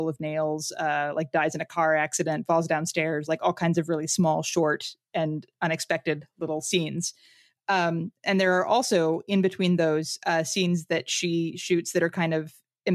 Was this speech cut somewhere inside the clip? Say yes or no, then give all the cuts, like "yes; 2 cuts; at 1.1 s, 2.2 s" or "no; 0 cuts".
no; 0 cuts